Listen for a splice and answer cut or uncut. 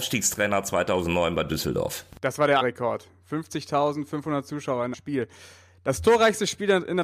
cut